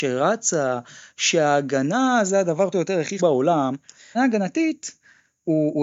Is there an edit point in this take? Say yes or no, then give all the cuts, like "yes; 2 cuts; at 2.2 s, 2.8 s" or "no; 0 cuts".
yes; 3 cuts; at 2.7 s, 3.2 s, 4.1 s